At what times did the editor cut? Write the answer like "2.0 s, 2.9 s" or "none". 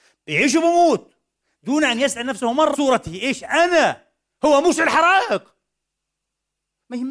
2.7 s